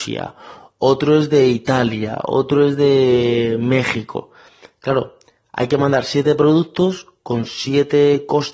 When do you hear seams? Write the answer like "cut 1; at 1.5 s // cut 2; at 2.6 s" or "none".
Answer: none